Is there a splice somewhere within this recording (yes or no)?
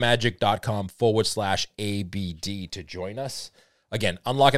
no